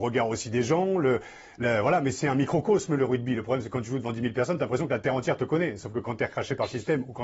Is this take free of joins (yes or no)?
yes